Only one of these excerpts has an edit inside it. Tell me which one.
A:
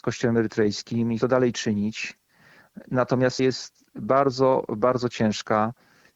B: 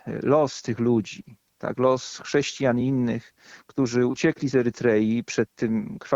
A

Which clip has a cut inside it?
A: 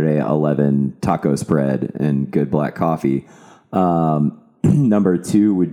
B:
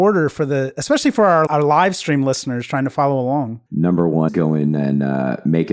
B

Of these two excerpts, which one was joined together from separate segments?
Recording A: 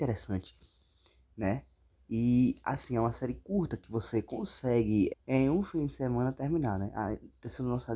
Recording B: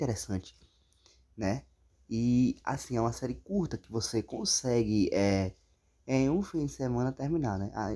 A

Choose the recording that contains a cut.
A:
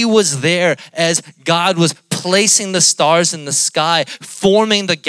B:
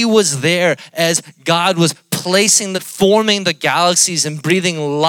B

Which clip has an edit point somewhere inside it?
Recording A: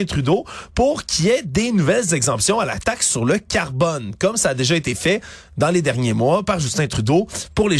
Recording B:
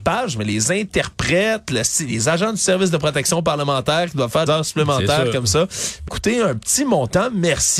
B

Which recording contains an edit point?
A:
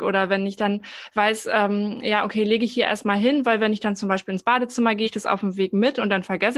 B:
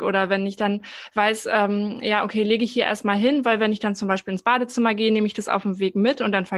A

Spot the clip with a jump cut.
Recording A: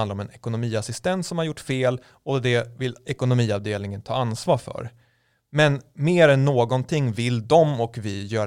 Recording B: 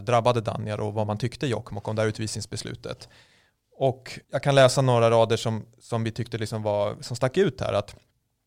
B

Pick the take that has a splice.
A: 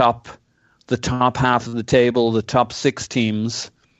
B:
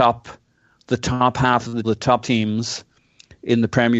B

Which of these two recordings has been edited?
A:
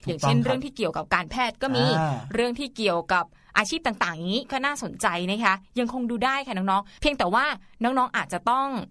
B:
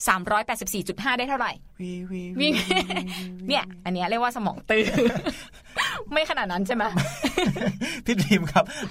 B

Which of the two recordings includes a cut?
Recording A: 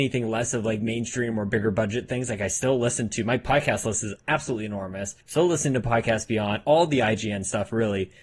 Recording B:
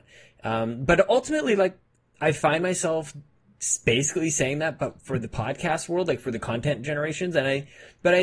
A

